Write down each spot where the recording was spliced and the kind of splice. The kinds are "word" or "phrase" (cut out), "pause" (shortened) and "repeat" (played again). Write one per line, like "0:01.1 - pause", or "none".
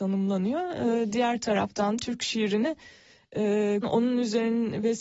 0:02.0 - phrase
0:03.8 - word